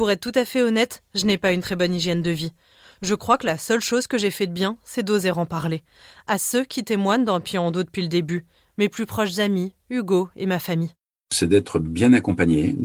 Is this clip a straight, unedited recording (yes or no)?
yes